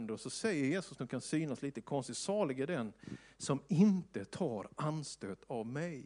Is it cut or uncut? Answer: cut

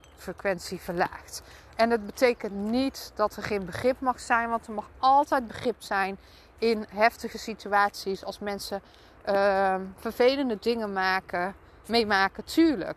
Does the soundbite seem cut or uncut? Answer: uncut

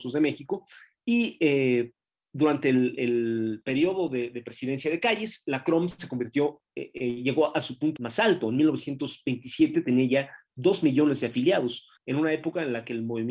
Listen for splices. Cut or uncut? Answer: cut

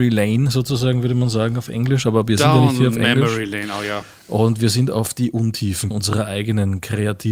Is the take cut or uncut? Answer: cut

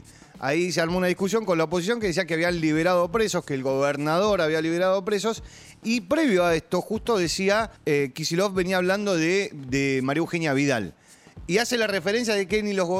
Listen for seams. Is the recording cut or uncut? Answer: cut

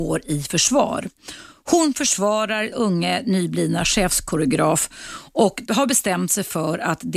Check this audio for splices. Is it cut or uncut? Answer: cut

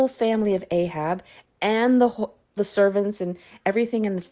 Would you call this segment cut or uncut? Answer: cut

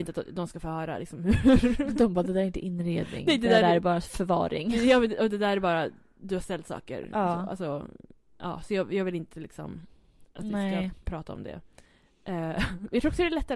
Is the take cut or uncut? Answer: uncut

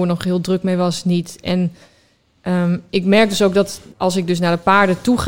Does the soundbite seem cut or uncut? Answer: cut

